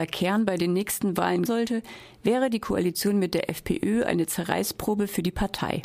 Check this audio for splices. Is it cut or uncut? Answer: cut